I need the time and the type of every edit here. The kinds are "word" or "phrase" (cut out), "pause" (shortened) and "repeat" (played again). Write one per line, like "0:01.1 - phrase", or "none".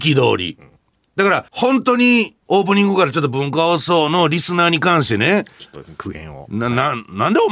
0:01.5 - pause
0:02.4 - pause